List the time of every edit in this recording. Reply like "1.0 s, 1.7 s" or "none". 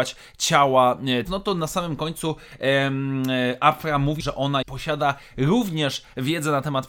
1.3 s, 4.2 s, 4.6 s

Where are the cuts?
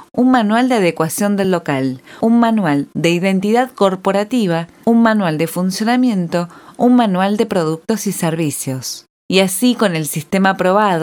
none

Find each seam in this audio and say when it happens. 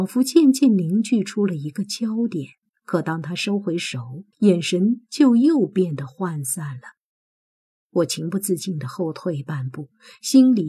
2.7 s, 4.3 s

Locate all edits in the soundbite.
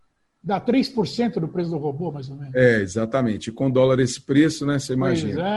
none

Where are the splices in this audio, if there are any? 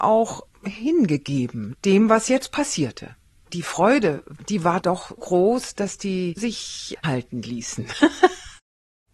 4.8 s, 5.2 s, 6.4 s, 7.0 s

